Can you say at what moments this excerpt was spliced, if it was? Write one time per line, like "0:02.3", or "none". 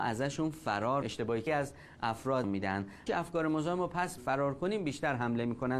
0:01.0
0:01.5
0:02.4
0:03.1
0:04.2